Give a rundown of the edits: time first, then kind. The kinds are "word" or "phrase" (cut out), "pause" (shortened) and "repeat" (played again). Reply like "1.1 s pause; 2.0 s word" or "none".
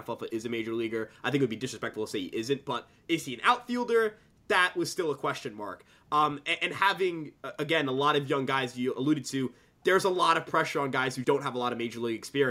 11.2 s word